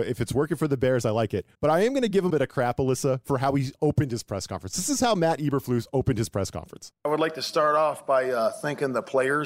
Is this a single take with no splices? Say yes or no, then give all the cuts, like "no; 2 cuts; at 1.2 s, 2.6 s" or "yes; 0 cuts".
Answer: no; 2 cuts; at 1.5 s, 2.3 s